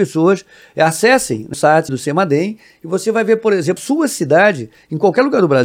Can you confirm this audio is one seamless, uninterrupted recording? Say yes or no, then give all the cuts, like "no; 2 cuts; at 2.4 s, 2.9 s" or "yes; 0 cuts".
no; 3 cuts; at 1.5 s, 1.9 s, 3.8 s